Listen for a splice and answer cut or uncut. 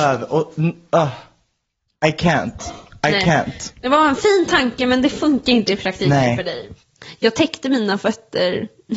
uncut